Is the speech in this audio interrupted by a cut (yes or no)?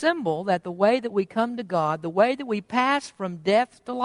no